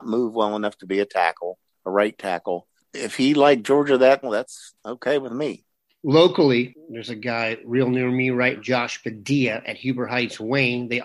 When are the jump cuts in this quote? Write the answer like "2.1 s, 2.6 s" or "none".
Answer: 4.2 s, 4.8 s, 5.7 s, 8.6 s